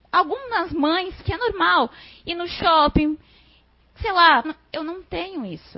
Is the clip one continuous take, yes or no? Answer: no